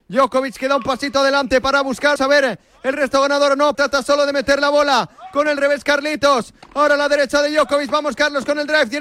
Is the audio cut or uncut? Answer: cut